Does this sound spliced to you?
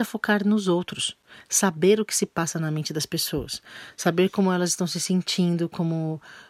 no; 0 cuts

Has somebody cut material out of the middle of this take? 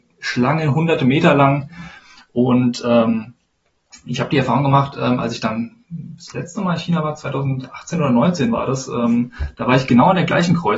no; 0 cuts

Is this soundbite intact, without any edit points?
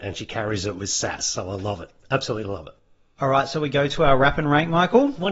yes; 0 cuts

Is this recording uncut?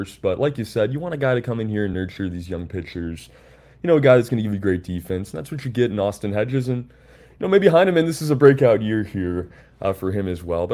yes; 0 cuts

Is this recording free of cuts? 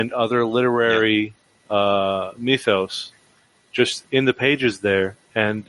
yes; 0 cuts

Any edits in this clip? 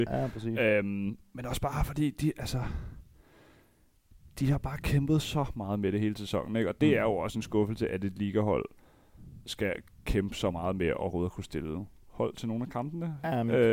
yes; 1 cut; at 4.3 s

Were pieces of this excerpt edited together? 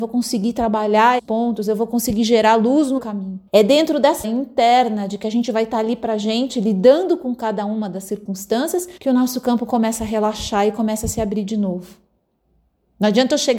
yes; 5 cuts; at 1.2 s, 3.0 s, 3.5 s, 4.2 s, 9.0 s

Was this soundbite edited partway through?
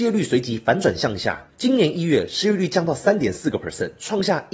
no; 0 cuts

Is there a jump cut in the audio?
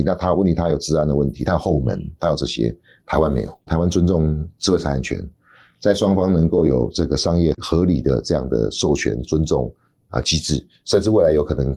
no; 0 cuts

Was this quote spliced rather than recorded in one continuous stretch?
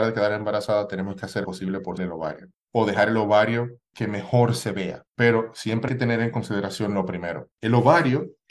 yes; 7 cuts; at 1.4 s, 2.0 s, 2.6 s, 3.9 s, 5.1 s, 5.9 s, 7.5 s

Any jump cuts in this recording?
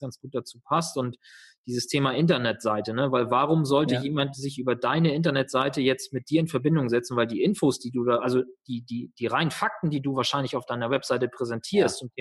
no; 0 cuts

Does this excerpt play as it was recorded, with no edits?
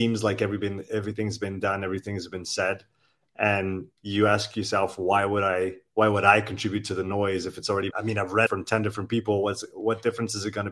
no; 3 cuts; at 3.9 s, 7.9 s, 8.5 s

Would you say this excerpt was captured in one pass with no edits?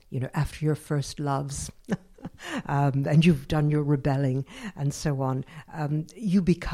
yes; 0 cuts

